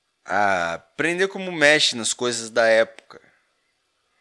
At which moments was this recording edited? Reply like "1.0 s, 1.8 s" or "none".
none